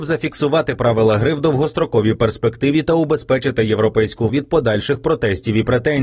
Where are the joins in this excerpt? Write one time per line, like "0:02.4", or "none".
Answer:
0:04.3